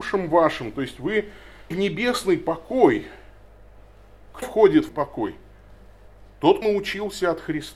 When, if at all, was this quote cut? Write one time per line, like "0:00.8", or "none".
0:01.7
0:04.4
0:04.9
0:06.6